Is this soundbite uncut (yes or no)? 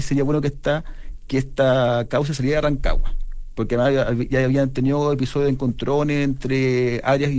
yes